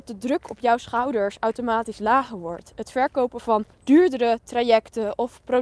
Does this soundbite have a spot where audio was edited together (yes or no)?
yes